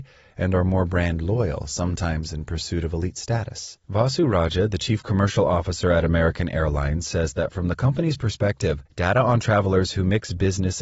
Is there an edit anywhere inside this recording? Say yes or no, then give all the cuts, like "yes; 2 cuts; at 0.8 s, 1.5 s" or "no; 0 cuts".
yes; 2 cuts; at 3.8 s, 8.9 s